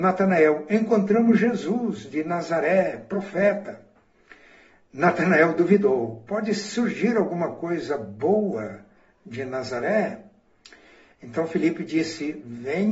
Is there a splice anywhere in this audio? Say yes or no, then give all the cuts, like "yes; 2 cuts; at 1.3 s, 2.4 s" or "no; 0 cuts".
no; 0 cuts